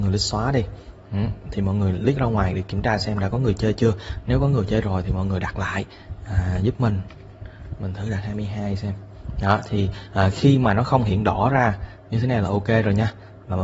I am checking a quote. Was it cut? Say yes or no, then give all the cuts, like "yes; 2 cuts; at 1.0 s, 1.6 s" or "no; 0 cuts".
no; 0 cuts